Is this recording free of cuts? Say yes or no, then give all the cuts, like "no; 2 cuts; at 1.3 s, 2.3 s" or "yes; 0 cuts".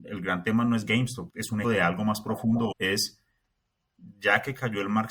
no; 3 cuts; at 1.3 s, 1.6 s, 2.7 s